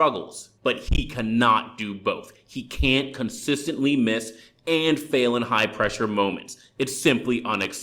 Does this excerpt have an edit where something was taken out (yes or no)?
no